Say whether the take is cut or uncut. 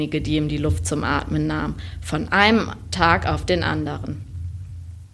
uncut